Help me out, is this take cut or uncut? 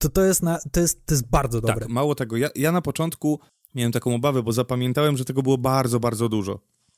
uncut